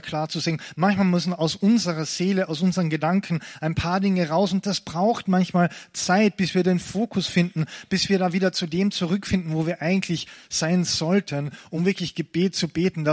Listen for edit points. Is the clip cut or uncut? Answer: uncut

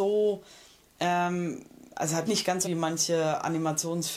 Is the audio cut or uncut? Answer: cut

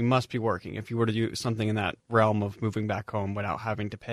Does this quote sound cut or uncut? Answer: cut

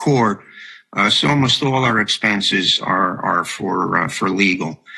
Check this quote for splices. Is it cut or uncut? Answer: uncut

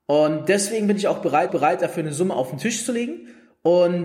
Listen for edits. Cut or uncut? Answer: cut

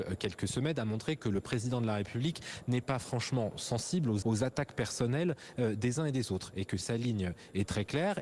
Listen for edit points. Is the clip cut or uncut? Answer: cut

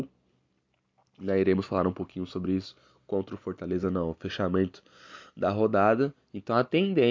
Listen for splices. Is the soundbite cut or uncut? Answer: uncut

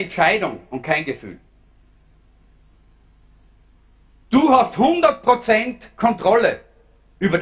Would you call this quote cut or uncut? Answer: uncut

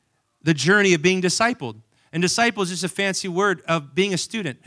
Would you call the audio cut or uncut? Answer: uncut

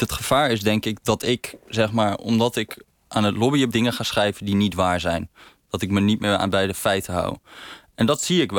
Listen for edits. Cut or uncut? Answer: cut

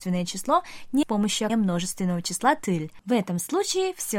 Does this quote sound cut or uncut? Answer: cut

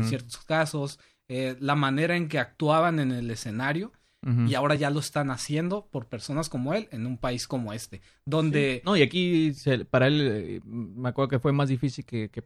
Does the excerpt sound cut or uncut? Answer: uncut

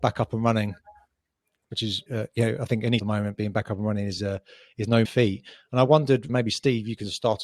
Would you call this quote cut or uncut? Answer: cut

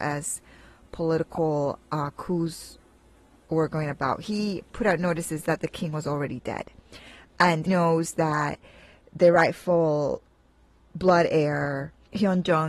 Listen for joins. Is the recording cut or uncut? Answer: cut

